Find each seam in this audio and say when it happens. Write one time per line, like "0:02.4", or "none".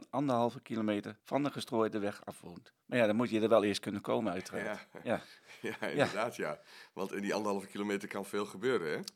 0:01.2
0:02.8